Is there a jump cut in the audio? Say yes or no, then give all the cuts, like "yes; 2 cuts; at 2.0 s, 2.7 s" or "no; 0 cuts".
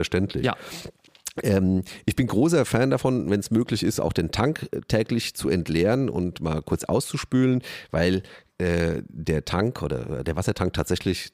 no; 0 cuts